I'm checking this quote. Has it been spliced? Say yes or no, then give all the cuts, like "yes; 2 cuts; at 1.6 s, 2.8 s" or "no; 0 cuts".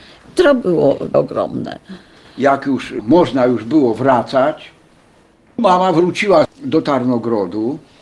yes; 1 cut; at 1.1 s